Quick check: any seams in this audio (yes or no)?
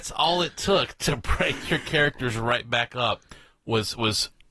no